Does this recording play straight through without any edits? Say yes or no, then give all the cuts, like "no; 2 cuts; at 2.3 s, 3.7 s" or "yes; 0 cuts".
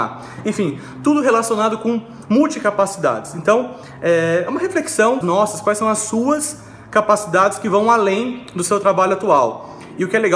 no; 1 cut; at 5.2 s